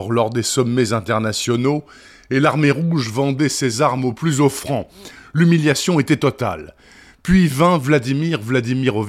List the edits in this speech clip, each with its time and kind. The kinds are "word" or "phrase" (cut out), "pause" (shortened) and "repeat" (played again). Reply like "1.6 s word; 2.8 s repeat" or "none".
none